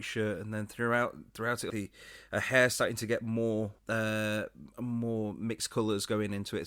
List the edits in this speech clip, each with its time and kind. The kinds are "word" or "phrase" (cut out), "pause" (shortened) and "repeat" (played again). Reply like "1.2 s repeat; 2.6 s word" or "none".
1.7 s phrase; 3.8 s pause

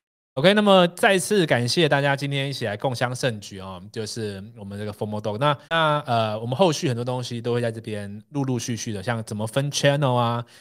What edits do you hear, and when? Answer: 5.6 s pause

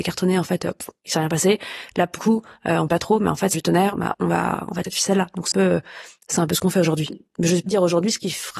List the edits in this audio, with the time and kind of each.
2.2 s word; 2.9 s word; 3.5 s word; 4.1 s word; 4.8 s word; 5.5 s word; 7.7 s word

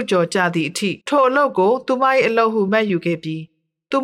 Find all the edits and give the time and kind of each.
1.0 s pause

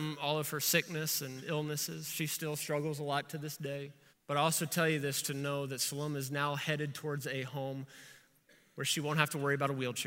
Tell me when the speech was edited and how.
4.1 s pause

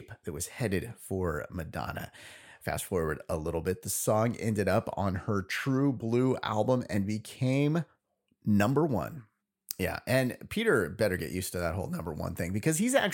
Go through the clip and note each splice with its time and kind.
none

